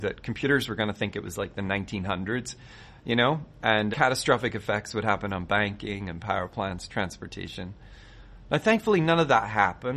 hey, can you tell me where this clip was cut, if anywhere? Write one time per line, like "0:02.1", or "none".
0:03.9